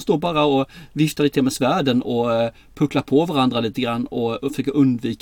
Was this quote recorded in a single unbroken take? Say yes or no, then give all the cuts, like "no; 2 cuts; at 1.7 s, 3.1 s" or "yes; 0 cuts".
yes; 0 cuts